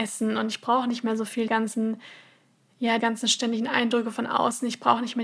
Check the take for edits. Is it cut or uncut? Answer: cut